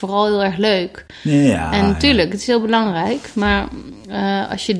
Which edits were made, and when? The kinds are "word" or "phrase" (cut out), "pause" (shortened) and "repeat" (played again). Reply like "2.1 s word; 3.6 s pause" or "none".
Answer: none

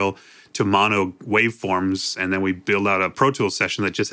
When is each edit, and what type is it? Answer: none

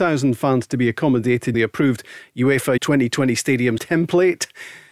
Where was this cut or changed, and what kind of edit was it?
1.5 s word; 2.8 s word; 3.8 s word

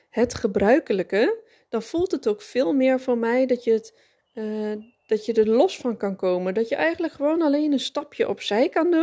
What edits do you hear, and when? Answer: none

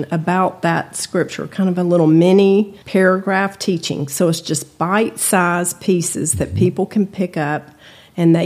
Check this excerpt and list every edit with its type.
2.8 s pause

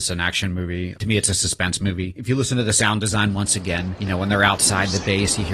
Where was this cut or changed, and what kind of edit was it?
none

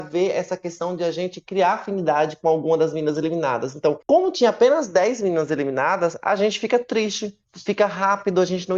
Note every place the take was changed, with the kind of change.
4.0 s pause

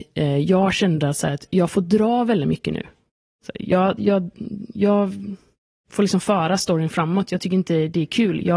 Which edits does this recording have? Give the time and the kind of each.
none

